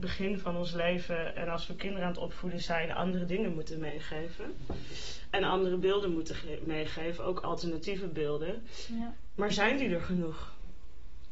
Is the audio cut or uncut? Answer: uncut